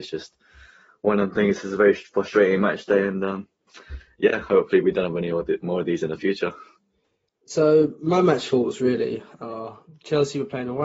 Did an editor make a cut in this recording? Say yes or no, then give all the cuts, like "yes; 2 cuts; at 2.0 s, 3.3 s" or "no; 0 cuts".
no; 0 cuts